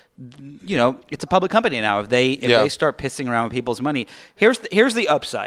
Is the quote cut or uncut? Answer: uncut